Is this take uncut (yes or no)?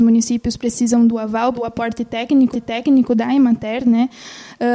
no